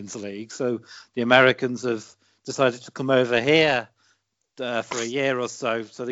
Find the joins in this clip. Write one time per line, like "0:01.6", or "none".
none